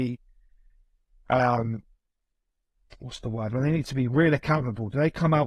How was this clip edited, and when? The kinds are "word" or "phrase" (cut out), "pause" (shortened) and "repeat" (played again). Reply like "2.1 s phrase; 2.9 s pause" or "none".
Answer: none